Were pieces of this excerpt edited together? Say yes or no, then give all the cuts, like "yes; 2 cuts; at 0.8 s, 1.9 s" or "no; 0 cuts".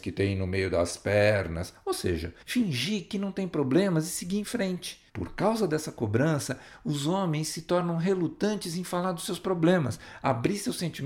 yes; 2 cuts; at 2.4 s, 5.1 s